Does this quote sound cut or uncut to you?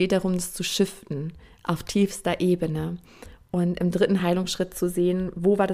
uncut